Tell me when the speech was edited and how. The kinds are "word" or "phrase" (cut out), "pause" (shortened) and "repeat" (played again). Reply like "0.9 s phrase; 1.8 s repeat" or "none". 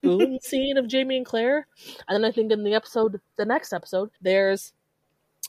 4.2 s pause

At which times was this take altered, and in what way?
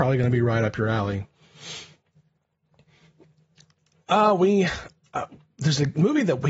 none

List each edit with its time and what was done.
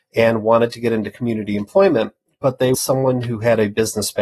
2.7 s word

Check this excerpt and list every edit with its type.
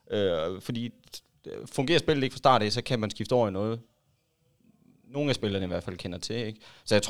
none

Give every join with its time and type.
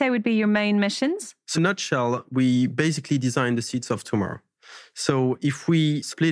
1.5 s word

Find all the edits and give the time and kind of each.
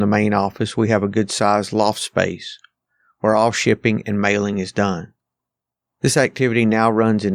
none

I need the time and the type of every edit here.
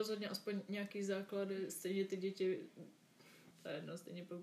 3.5 s word

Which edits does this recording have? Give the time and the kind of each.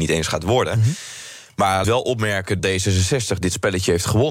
1.8 s phrase; 2.6 s word

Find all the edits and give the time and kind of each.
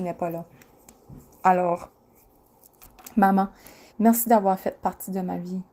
3.9 s pause

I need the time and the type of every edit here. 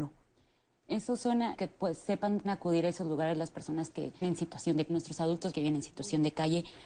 1.6 s word; 2.4 s word; 4.2 s word; 4.9 s word; 5.5 s word

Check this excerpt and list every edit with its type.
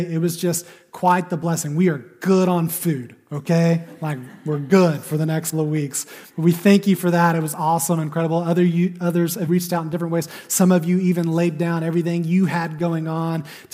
5.5 s word; 9.5 s word

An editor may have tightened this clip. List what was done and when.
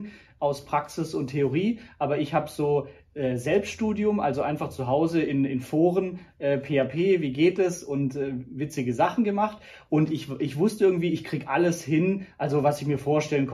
none

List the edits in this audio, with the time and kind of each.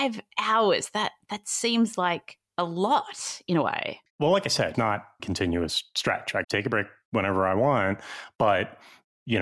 2.5 s pause; 4.1 s pause; 4.7 s word; 5.2 s word; 6.4 s word

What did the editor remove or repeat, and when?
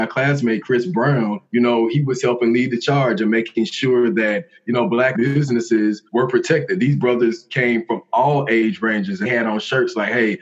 1.5 s pause; 5.1 s word; 6.1 s pause; 9.2 s word

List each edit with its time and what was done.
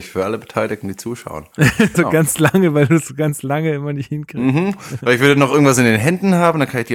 1.9 s word

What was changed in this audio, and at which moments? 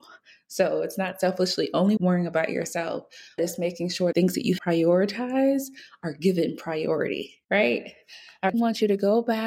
2.0 s word; 3.4 s word; 4.1 s word; 4.6 s word; 7.4 s pause; 8.5 s word

